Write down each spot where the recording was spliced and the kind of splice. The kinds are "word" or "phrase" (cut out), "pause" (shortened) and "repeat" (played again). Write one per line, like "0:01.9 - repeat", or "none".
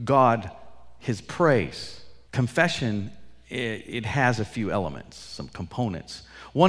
0:02.3 - pause